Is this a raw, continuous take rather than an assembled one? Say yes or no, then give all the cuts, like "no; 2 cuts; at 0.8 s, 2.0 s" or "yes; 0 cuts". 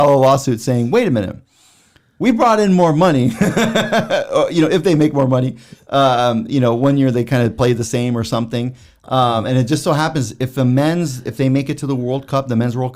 yes; 0 cuts